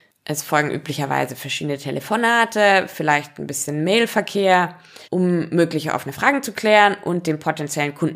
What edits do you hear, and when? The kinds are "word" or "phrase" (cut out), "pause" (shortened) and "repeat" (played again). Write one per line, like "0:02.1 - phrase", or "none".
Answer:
0:05.0 - pause

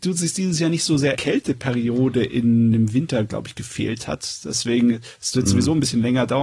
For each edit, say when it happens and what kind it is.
0:01.1 - phrase

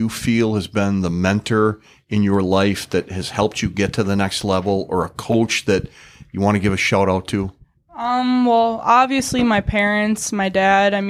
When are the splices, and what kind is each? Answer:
none

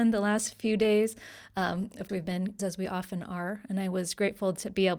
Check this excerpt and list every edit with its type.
0:02.1 - word
0:02.6 - phrase

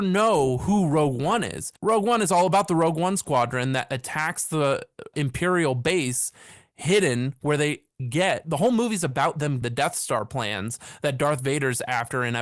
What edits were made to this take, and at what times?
0:01.8 - pause
0:05.1 - word
0:08.0 - word
0:09.6 - word

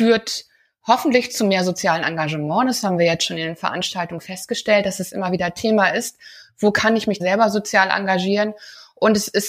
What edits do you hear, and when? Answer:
0:07.2 - word

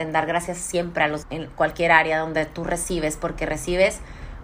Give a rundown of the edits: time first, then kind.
0:01.2 - word

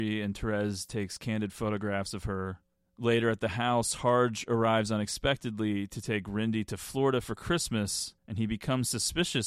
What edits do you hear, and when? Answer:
0:08.2 - pause

